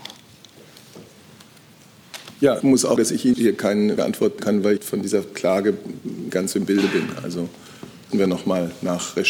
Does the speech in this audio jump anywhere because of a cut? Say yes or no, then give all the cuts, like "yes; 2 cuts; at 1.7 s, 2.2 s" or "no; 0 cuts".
yes; 8 cuts; at 2.6 s, 3.0 s, 3.3 s, 4.0 s, 4.4 s, 4.8 s, 6.3 s, 8.1 s